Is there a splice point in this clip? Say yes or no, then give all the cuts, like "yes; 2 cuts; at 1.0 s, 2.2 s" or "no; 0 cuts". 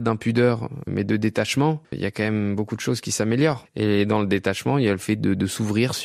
yes; 1 cut; at 1.8 s